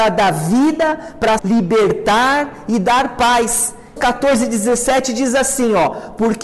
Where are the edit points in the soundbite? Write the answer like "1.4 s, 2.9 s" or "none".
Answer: 1.4 s, 4.0 s